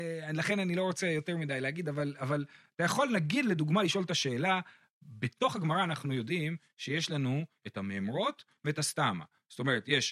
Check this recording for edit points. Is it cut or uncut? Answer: uncut